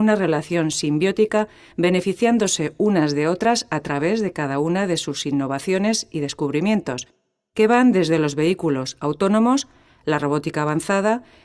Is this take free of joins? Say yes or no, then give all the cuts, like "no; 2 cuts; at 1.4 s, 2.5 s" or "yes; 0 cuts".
yes; 0 cuts